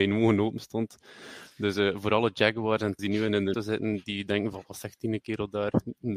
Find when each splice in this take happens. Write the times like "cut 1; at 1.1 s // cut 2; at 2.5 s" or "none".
cut 1; at 3.0 s // cut 2; at 3.5 s